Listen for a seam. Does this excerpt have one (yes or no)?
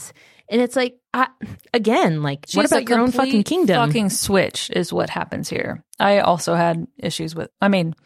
yes